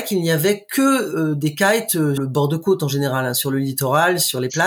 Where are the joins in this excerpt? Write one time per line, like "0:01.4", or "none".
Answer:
0:02.2